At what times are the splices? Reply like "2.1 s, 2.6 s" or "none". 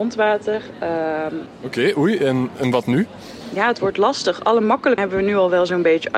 5.0 s